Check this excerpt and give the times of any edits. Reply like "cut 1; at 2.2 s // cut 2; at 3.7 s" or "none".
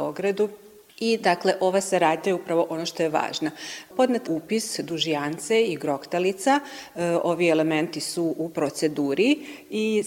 cut 1; at 4.3 s

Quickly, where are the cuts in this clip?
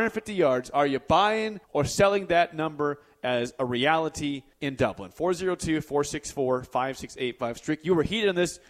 cut 1; at 1.6 s // cut 2; at 4.5 s

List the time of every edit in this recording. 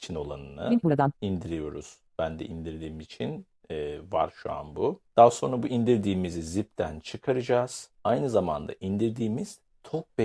cut 1; at 1.2 s // cut 2; at 5.1 s // cut 3; at 7.9 s

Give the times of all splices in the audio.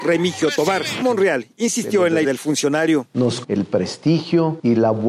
cut 1; at 1.0 s // cut 2; at 2.2 s // cut 3; at 3.4 s

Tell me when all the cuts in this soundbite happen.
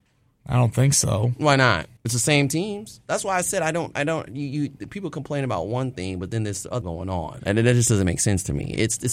cut 1; at 2.0 s // cut 2; at 6.8 s

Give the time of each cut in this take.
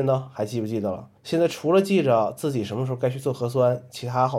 cut 1; at 1.2 s

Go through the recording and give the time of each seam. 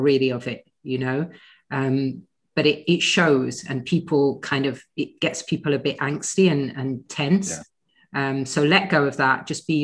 none

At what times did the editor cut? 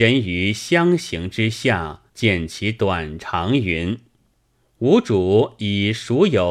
cut 1; at 2.1 s // cut 2; at 4.5 s

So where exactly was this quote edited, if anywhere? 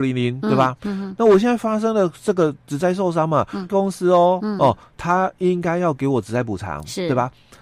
cut 1; at 3.7 s

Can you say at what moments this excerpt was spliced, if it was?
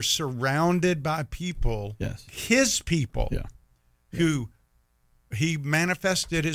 none

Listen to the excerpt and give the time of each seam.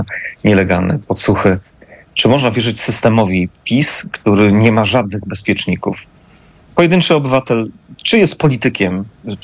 cut 1; at 3.6 s

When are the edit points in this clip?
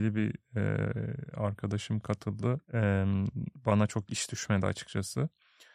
cut 1; at 2.6 s

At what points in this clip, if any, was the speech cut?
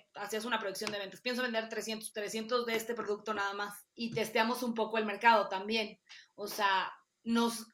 cut 1; at 2.1 s // cut 2; at 3.9 s

